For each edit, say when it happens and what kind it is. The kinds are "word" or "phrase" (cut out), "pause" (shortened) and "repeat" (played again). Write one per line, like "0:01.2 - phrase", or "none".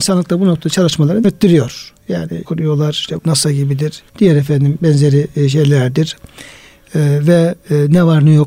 0:01.2 - word
0:02.4 - phrase
0:03.2 - word
0:04.1 - pause